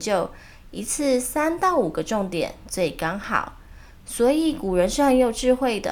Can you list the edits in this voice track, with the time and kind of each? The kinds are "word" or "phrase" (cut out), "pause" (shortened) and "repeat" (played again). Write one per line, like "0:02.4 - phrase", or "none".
none